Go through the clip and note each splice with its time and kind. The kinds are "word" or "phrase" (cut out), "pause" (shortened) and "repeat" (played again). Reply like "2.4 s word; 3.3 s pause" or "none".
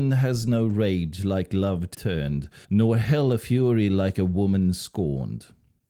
1.9 s word; 2.6 s pause